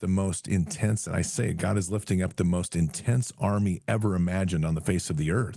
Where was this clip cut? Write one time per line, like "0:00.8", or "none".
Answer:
none